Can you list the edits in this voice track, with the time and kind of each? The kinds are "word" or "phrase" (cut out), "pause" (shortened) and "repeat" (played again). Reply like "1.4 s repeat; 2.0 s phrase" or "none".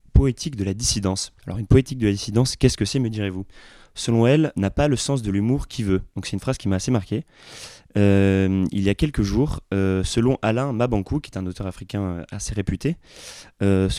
1.4 s pause; 4.5 s word; 6.1 s pause

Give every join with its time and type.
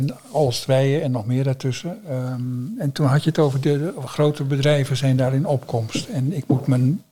none

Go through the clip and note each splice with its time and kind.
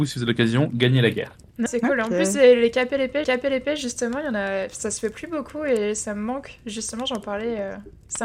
1.7 s word; 3.2 s repeat

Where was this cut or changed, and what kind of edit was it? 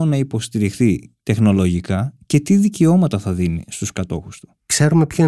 none

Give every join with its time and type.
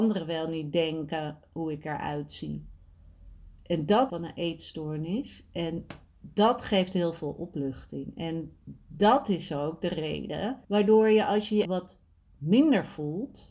4.1 s phrase; 10.6 s pause; 11.6 s word

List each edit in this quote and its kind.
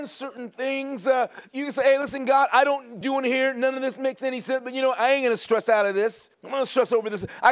3.0 s phrase; 6.3 s pause

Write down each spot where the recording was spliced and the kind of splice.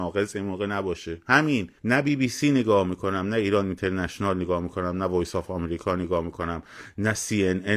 1.8 s pause

